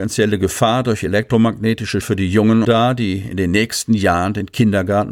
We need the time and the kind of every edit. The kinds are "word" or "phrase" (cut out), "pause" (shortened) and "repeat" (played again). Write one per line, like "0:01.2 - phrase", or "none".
0:02.0 - word
0:02.6 - phrase